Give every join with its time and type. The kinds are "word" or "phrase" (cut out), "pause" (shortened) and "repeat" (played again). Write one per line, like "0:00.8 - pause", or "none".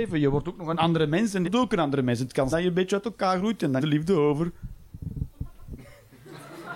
0:01.4 - word
0:02.5 - word
0:03.8 - word